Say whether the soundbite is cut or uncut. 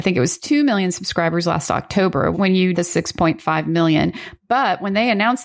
cut